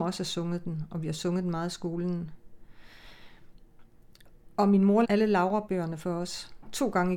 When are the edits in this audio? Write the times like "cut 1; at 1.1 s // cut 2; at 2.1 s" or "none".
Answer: cut 1; at 5.0 s